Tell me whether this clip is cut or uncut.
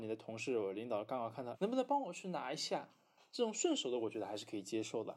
cut